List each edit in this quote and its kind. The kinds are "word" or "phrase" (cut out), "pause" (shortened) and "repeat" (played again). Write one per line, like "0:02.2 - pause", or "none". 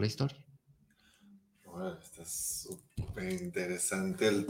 none